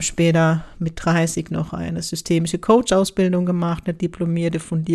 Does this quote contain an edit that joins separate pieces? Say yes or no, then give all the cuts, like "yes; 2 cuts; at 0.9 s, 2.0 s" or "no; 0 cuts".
no; 0 cuts